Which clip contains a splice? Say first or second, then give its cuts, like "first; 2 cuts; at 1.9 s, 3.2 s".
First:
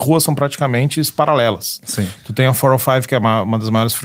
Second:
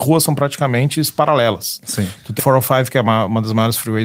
second; 1 cut; at 2.4 s